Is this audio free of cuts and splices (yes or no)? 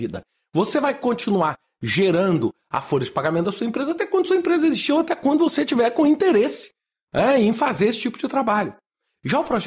yes